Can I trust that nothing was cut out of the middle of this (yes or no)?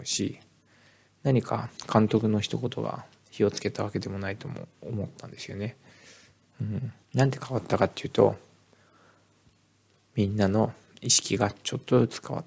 no